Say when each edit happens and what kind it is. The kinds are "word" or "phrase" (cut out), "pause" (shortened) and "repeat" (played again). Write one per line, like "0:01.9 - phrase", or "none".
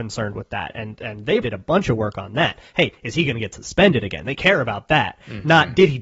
0:01.4 - word

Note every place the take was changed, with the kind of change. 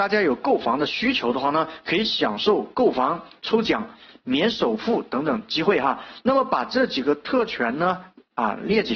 none

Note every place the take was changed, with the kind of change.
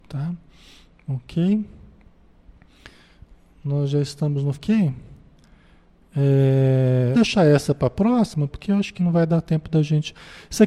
0:04.5 - word
0:07.1 - word
0:08.5 - word
0:09.0 - word

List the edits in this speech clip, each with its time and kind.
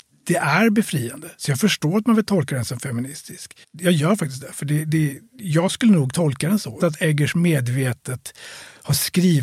0:03.6 - pause
0:06.8 - phrase

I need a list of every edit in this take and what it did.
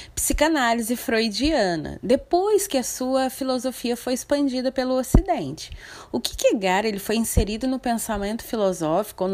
none

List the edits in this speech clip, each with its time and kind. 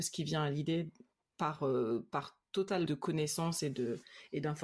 0:02.9 - phrase

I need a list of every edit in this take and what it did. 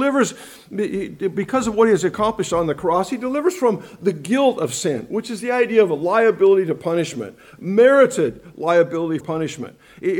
0:09.2 - word

